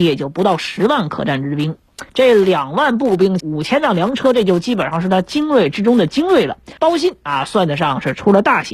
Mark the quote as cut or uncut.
cut